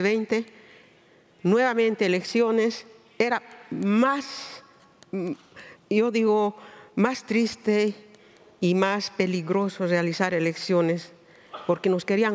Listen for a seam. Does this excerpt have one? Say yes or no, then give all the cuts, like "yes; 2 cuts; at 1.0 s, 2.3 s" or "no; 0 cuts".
no; 0 cuts